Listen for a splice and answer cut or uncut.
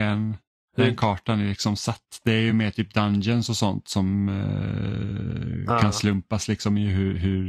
uncut